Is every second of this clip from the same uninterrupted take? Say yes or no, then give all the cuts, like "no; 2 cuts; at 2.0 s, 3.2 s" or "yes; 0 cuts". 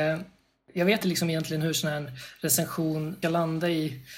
no; 2 cuts; at 1.0 s, 3.2 s